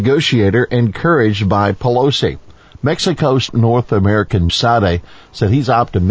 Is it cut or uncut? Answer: cut